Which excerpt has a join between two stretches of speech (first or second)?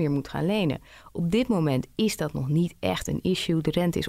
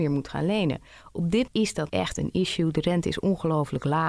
second